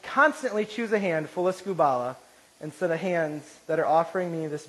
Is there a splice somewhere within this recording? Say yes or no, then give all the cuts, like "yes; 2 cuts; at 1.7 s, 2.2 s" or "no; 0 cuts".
no; 0 cuts